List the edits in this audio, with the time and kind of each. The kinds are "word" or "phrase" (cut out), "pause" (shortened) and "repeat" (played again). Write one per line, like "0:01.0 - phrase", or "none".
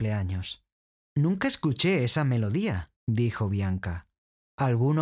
0:00.9 - pause
0:03.0 - pause